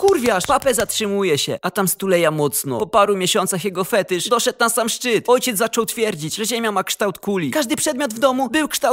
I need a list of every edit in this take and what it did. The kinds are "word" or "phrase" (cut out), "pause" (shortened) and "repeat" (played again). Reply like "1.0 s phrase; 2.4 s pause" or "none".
none